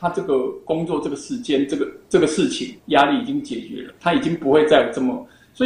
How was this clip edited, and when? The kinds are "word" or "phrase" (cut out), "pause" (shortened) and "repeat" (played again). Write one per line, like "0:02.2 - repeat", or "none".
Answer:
0:02.8 - pause
0:04.0 - pause